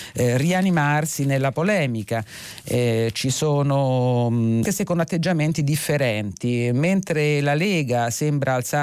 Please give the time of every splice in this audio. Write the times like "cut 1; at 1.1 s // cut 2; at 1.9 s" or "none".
cut 1; at 4.7 s